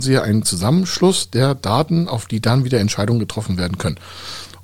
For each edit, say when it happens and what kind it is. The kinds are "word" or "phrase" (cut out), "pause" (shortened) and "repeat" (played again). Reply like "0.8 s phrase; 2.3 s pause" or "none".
none